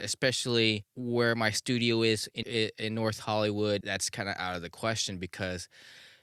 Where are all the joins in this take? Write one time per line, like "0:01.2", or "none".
0:02.4
0:03.8